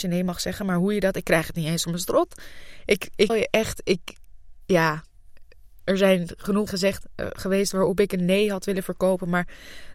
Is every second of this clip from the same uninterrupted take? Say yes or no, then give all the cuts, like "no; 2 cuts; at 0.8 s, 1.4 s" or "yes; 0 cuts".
no; 4 cuts; at 1.1 s, 1.8 s, 3.3 s, 6.7 s